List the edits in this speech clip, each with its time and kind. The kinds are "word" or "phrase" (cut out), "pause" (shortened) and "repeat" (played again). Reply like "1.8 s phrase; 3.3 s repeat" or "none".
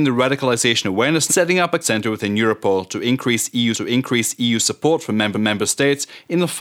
1.3 s phrase; 1.8 s word; 3.7 s repeat; 5.3 s repeat